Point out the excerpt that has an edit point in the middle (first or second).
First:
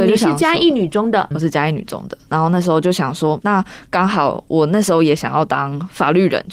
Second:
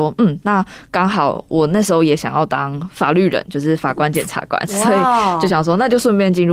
first